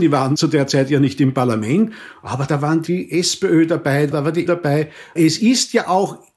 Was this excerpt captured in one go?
no; 1 cut; at 4.5 s

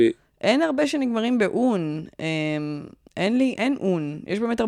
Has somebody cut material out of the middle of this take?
yes; 2 cuts; at 3.1 s, 3.6 s

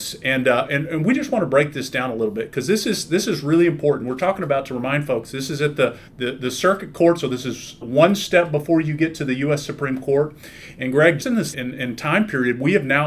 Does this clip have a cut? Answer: yes; 4 cuts; at 6.1 s, 7.8 s, 11.2 s, 11.5 s

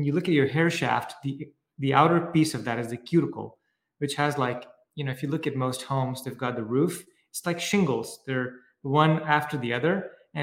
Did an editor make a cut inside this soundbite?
no; 0 cuts

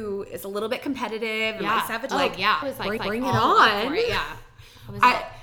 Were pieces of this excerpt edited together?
yes; 3 cuts; at 2.1 s, 2.6 s, 3.0 s

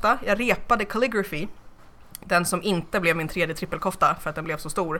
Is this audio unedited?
yes; 0 cuts

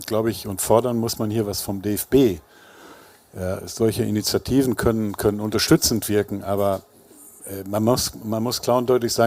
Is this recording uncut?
yes; 0 cuts

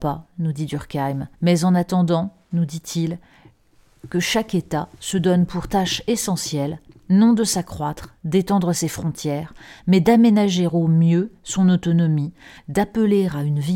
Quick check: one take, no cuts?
no; 1 cut; at 1.3 s

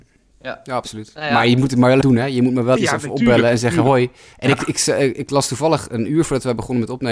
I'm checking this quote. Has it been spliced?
yes; 3 cuts; at 2.0 s, 2.8 s, 4.3 s

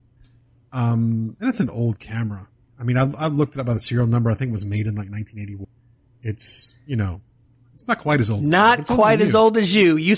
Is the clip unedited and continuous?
yes; 0 cuts

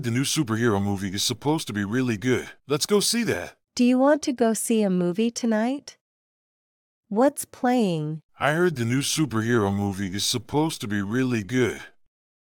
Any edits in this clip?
yes; 3 cuts; at 2.6 s, 3.6 s, 8.3 s

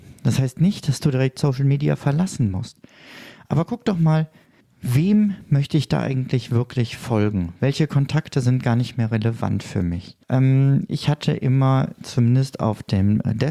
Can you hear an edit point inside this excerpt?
yes; 2 cuts; at 4.6 s, 10.2 s

